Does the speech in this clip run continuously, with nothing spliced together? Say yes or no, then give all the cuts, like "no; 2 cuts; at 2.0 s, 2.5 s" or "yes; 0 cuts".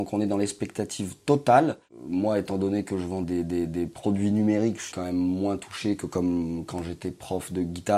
no; 2 cuts; at 3.2 s, 4.9 s